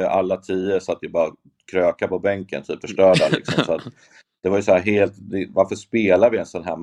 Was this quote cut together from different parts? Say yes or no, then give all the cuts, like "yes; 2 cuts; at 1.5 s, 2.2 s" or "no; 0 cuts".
yes; 1 cut; at 2.8 s